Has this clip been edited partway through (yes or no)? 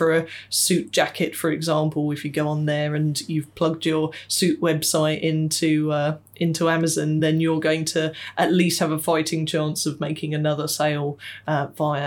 no